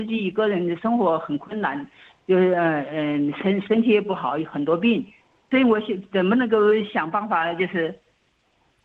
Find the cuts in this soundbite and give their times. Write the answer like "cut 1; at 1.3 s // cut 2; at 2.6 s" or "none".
none